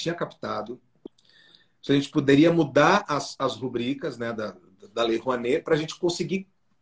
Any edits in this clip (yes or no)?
no